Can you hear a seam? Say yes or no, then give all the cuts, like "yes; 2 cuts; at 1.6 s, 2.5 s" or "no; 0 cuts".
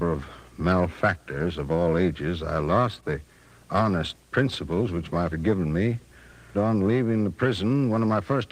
yes; 2 cuts; at 5.3 s, 6.5 s